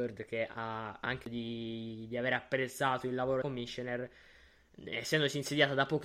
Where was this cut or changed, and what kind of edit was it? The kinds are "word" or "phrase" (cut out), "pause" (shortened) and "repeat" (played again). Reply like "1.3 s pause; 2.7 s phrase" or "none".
1.2 s word; 3.4 s word

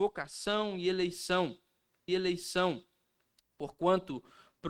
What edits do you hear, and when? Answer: 2.1 s repeat

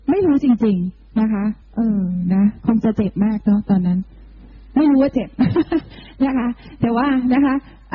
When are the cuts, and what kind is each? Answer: 1.6 s pause

